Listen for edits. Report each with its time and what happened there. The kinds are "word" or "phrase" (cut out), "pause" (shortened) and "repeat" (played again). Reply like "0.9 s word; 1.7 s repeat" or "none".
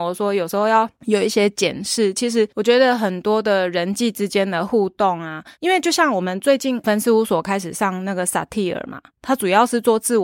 5.5 s pause